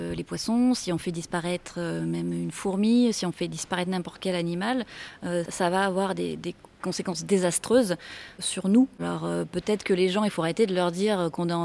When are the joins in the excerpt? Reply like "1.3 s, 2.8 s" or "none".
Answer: 5.5 s